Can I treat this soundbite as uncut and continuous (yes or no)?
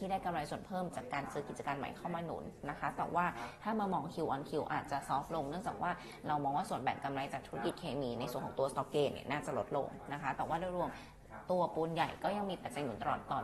yes